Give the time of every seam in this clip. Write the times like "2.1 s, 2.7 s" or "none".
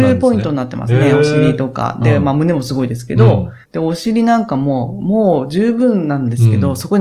3.6 s